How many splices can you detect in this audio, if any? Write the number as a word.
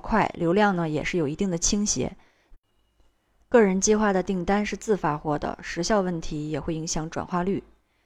zero